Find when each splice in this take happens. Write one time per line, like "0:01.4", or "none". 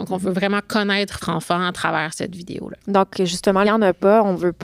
0:01.2
0:02.8
0:03.6